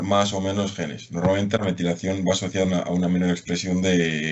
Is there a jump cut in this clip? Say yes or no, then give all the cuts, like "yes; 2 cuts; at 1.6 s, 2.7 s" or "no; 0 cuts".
yes; 1 cut; at 2.6 s